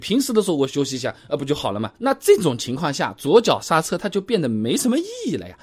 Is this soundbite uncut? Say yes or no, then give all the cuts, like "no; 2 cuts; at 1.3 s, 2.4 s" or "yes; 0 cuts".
no; 1 cut; at 2.0 s